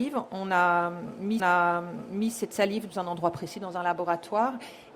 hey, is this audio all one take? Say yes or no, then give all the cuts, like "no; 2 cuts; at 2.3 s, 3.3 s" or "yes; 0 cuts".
no; 2 cuts; at 1.4 s, 2.9 s